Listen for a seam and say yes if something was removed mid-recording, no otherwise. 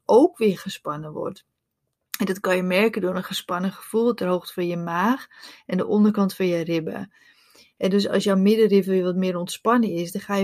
no